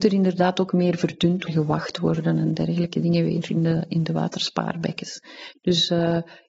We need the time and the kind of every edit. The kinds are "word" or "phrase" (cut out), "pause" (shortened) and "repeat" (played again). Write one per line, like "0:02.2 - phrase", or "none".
0:01.5 - phrase